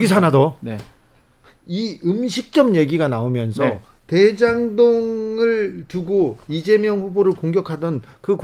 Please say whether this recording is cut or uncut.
uncut